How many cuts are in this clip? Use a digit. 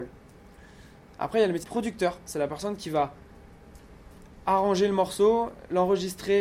1